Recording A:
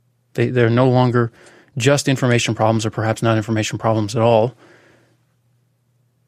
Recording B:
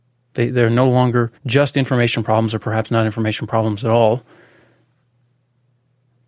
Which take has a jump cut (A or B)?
B